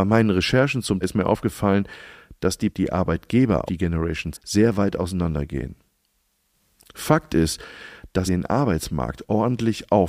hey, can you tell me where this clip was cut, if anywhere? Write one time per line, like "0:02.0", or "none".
0:01.0
0:02.7
0:03.7
0:04.3
0:06.5
0:08.3